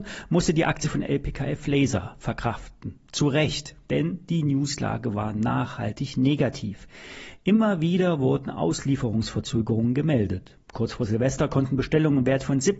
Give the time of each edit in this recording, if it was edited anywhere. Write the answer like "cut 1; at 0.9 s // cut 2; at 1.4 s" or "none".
none